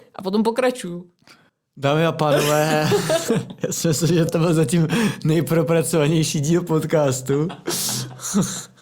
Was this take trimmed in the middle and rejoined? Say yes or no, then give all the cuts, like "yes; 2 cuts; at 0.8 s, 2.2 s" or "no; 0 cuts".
yes; 2 cuts; at 1.5 s, 4.3 s